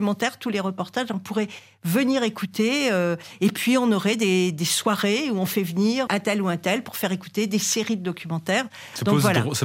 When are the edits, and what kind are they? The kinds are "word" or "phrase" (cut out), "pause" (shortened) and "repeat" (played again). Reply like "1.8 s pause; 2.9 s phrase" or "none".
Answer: 6.1 s word